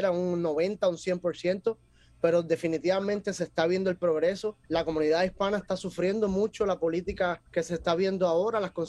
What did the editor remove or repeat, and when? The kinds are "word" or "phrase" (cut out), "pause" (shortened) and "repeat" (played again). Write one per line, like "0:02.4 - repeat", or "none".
0:04.6 - pause
0:07.5 - pause